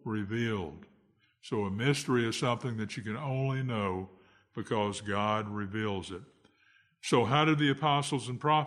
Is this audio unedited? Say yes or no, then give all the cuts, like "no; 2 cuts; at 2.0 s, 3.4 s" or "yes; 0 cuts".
yes; 0 cuts